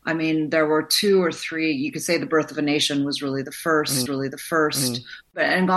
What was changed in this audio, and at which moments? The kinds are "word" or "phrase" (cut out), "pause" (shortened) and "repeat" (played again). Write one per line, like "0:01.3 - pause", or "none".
0:04.1 - repeat

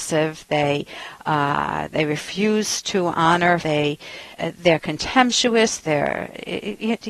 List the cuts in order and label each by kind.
0:03.6 - phrase
0:04.3 - pause

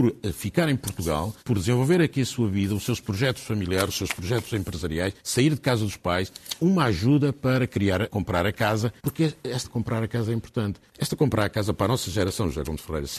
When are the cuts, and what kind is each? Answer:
0:01.4 - pause
0:05.2 - pause
0:06.6 - word
0:08.0 - word
0:09.0 - pause
0:09.6 - word
0:10.9 - pause

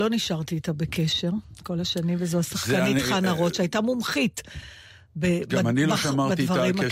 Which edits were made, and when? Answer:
none

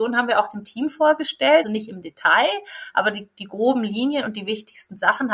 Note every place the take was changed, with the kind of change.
0:01.6 - word

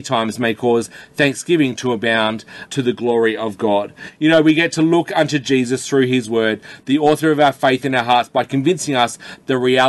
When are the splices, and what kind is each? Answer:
0:02.7 - word

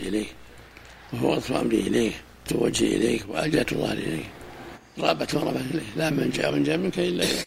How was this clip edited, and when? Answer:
0:02.5 - word
0:06.5 - word

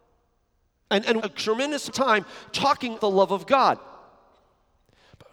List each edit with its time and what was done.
0:01.2 - phrase
0:01.9 - word
0:03.0 - word

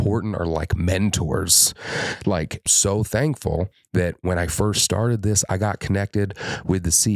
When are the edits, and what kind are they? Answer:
0:02.7 - phrase

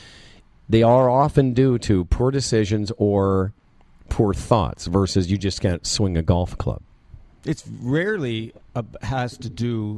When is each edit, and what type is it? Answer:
none

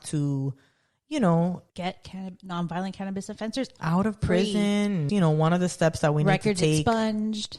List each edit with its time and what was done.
0:01.7 - pause
0:03.8 - word
0:05.1 - word

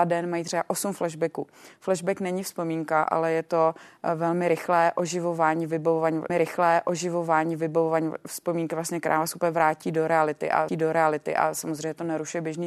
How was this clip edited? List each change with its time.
0:06.3 - repeat
0:10.7 - repeat

